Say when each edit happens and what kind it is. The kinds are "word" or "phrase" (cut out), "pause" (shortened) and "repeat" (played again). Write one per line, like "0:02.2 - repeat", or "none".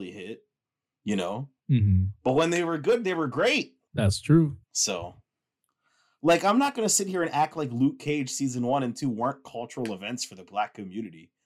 0:01.6 - pause
0:03.9 - pause
0:04.6 - pause